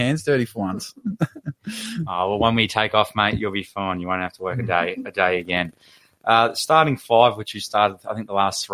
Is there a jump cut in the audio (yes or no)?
no